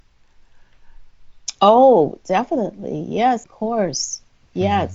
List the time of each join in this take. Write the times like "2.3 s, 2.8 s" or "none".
3.4 s